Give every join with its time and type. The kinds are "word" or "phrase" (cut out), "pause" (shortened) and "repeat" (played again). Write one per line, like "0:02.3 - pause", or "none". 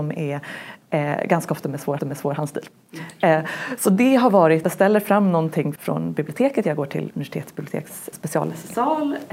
0:02.0 - repeat
0:04.6 - phrase
0:05.8 - word
0:07.1 - word
0:08.1 - word